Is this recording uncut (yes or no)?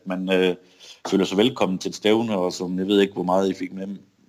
yes